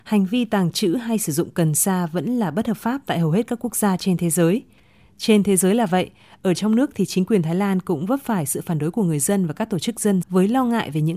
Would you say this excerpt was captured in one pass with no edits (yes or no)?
no